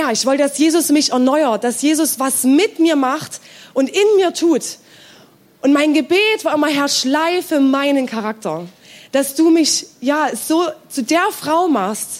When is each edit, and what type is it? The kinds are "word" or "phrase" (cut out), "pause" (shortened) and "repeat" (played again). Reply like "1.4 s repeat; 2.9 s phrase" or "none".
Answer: none